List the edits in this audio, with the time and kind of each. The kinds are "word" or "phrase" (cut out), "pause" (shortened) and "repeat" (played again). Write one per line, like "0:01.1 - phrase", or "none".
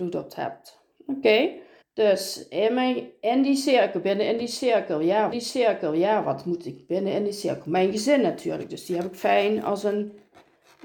0:01.8 - pause
0:05.3 - repeat